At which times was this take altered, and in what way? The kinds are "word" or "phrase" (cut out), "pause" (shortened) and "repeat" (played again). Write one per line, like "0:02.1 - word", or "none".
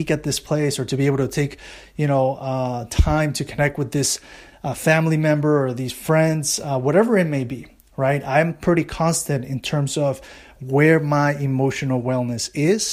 none